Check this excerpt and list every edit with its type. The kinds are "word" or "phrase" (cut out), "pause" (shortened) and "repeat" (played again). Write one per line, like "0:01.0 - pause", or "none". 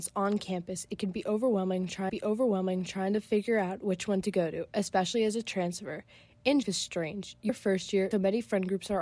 0:02.1 - repeat
0:06.6 - phrase
0:07.5 - phrase
0:08.1 - word